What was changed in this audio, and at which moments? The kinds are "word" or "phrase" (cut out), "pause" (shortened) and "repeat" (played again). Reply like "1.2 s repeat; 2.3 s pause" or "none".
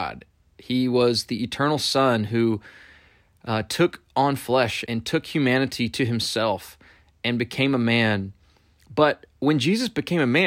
4.9 s word

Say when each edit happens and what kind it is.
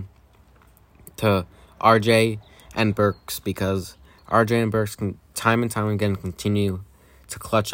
none

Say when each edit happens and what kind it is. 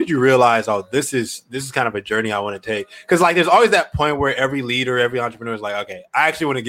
none

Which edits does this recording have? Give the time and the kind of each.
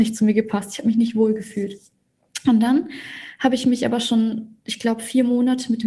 none

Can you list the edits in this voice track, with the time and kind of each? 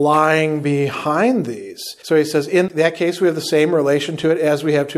2.0 s pause

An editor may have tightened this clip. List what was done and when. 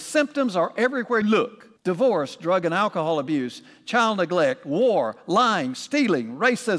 1.2 s word; 1.8 s pause

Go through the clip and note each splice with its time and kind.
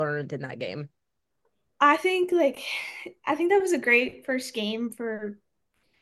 none

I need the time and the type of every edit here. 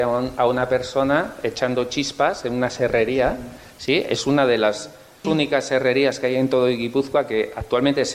5.2 s word

